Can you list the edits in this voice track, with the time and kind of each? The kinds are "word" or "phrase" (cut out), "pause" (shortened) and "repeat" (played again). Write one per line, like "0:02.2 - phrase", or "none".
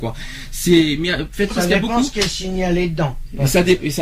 0:01.5 - word